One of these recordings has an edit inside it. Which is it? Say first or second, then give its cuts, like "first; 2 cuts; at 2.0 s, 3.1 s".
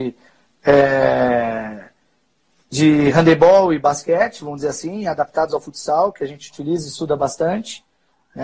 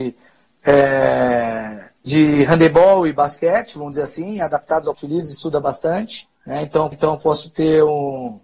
second; 4 cuts; at 2.0 s, 4.9 s, 6.3 s, 6.9 s